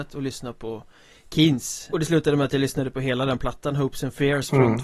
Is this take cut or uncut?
cut